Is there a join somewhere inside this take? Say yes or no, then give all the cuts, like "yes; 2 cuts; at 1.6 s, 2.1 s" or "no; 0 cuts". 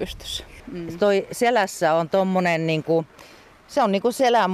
no; 0 cuts